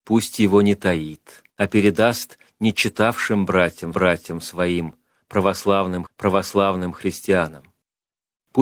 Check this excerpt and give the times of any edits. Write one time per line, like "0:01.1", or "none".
0:01.5
0:03.9
0:06.1

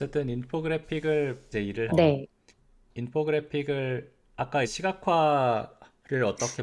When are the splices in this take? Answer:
0:01.5
0:01.9
0:02.5
0:04.6

